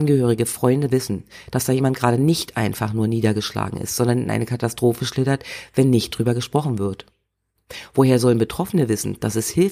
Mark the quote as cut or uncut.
uncut